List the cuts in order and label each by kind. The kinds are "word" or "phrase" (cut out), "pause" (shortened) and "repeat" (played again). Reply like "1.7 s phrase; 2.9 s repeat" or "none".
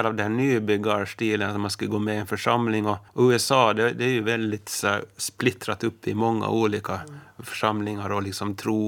3.1 s pause